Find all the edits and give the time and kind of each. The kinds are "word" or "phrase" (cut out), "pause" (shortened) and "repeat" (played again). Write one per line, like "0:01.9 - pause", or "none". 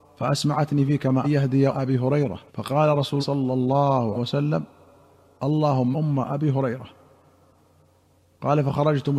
0:01.2 - phrase
0:01.7 - word
0:02.5 - pause
0:03.2 - word
0:04.1 - word
0:05.9 - word